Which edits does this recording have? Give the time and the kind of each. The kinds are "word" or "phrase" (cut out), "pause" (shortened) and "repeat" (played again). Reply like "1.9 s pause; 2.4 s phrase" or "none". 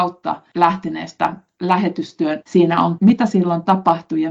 2.4 s word; 3.0 s phrase